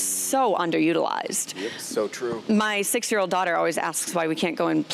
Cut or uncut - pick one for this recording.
uncut